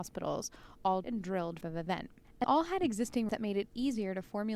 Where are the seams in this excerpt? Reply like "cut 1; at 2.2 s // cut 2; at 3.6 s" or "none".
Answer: cut 1; at 1.0 s // cut 2; at 1.6 s // cut 3; at 2.4 s // cut 4; at 3.3 s